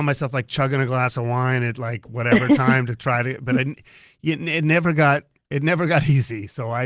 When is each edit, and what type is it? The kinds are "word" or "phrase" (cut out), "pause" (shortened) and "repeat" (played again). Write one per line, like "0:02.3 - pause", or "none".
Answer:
none